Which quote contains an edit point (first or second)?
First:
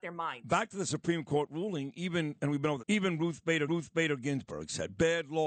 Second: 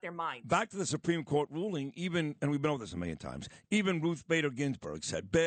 first